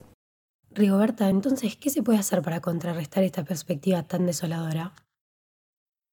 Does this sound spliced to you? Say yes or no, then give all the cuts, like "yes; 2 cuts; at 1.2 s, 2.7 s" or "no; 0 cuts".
no; 0 cuts